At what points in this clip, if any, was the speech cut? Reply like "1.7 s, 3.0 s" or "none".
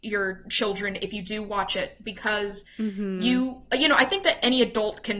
none